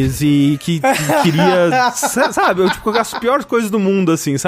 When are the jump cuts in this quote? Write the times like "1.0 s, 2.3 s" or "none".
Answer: none